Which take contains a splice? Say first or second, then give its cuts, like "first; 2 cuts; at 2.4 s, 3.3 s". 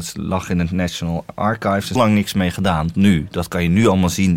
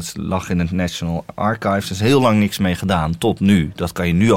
first; 2 cuts; at 2.0 s, 2.9 s